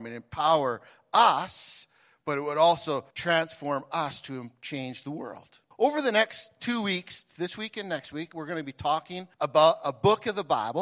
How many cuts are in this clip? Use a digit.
3